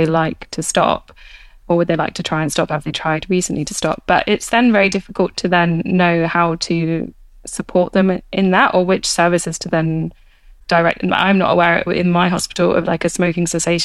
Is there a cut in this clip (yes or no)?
no